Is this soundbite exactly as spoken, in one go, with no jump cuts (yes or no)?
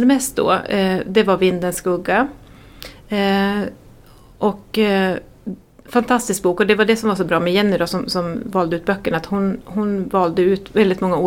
yes